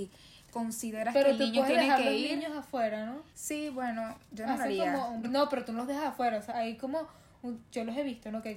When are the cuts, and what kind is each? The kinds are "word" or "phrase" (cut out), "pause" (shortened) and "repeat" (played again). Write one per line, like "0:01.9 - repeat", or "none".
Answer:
0:03.3 - pause
0:05.2 - word
0:06.5 - word